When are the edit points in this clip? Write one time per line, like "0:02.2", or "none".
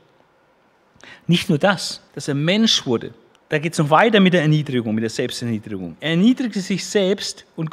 0:02.1
0:03.4